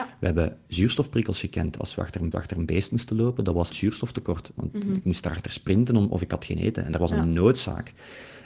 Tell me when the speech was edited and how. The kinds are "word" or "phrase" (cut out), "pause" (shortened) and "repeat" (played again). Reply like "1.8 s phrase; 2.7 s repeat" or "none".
2.3 s repeat; 3.7 s word